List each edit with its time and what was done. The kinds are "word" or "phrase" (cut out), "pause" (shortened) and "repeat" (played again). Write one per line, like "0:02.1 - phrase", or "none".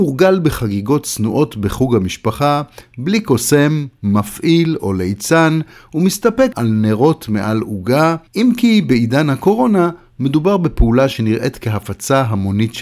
0:06.5 - word
0:08.3 - pause